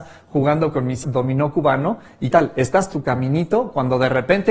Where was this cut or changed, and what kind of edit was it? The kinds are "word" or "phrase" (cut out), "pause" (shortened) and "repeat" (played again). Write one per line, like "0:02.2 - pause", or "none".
0:01.0 - word
0:02.3 - word
0:02.9 - word